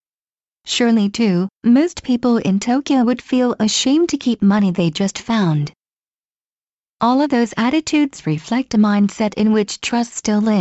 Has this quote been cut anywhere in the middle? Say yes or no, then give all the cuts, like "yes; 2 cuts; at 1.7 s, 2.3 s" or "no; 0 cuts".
yes; 1 cut; at 1.5 s